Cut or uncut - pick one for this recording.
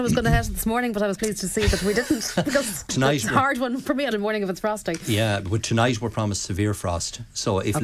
cut